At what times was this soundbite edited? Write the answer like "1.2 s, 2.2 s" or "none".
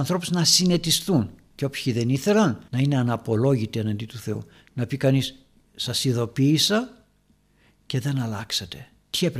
2.7 s